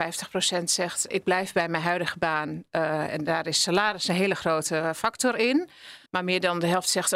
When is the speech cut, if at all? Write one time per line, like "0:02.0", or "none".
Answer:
0:01.1
0:06.1

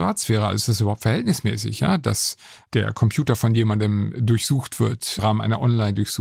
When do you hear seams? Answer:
0:05.2

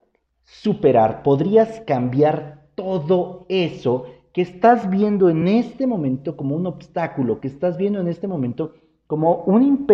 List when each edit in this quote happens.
none

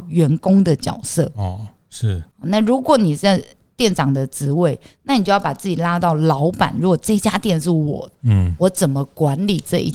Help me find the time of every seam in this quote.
none

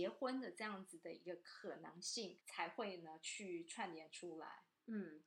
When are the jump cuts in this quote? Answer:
0:02.4

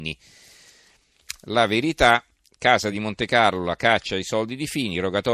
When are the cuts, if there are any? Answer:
none

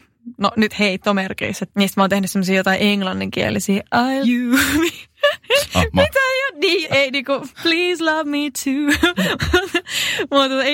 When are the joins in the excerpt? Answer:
0:01.7
0:04.2
0:05.1
0:06.8
0:07.5

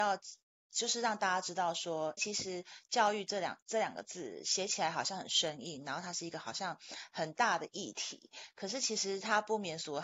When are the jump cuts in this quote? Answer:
0:02.2

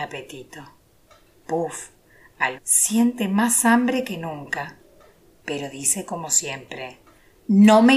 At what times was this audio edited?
0:02.5

